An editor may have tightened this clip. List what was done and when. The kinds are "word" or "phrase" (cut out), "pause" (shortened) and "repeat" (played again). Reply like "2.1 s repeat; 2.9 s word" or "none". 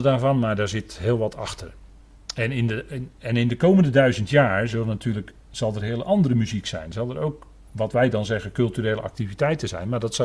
5.4 s pause; 7.7 s pause

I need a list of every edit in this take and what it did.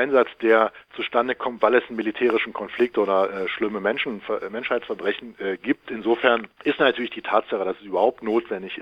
none

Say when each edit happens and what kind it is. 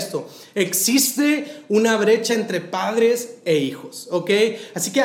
none

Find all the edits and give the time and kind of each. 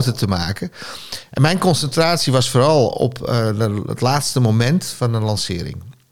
none

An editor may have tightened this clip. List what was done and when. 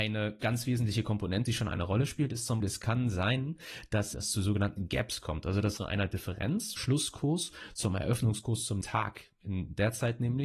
1.5 s word; 2.6 s word; 4.1 s word; 5.8 s word; 6.8 s word; 8.8 s word

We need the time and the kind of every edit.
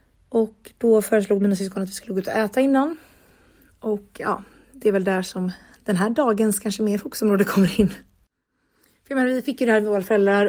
none

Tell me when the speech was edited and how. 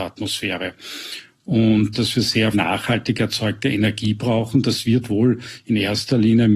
1.9 s phrase; 2.5 s word

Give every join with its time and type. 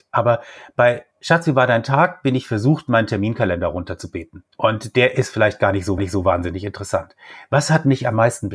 1.1 s pause; 4.5 s pause; 6.0 s repeat

